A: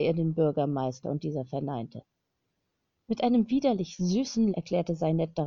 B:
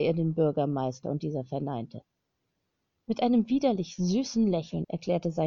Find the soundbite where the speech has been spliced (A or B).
A